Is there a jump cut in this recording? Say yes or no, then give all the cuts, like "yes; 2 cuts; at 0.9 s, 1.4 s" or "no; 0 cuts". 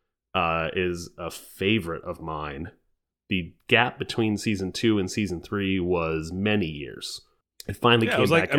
no; 0 cuts